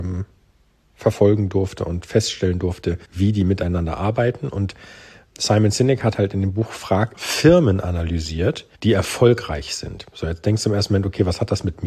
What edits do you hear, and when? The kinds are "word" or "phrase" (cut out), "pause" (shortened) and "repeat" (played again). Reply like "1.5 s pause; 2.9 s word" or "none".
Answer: 3.0 s pause; 5.3 s word; 7.1 s phrase; 8.7 s pause

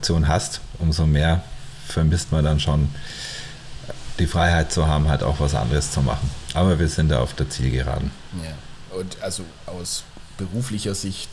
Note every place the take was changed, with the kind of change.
none

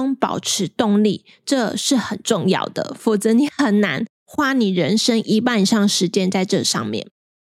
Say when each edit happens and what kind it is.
4.1 s pause

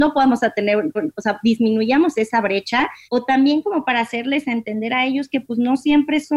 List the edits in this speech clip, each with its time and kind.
1.0 s repeat; 3.0 s pause

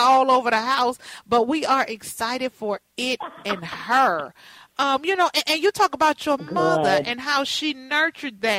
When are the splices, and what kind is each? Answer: none

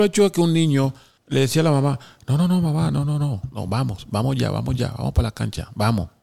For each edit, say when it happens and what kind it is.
none

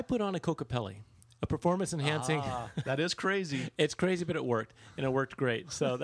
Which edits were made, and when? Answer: none

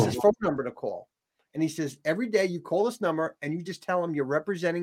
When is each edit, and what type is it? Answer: none

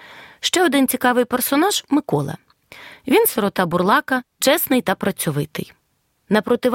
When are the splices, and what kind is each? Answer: none

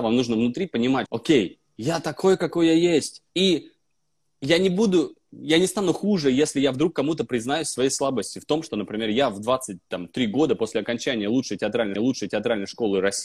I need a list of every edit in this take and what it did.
1.1 s word; 3.3 s pause; 12.0 s repeat

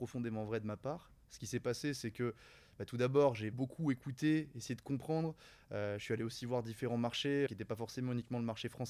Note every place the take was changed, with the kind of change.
3.5 s word; 7.5 s word

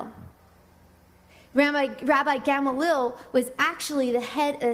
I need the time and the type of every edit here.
none

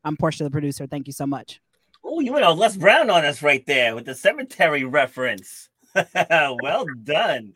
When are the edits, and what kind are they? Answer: none

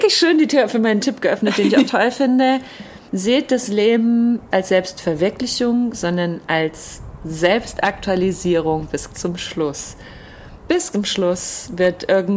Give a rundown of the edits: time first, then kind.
1.0 s word; 1.9 s word; 3.1 s pause; 4.5 s word; 9.1 s word; 10.9 s word

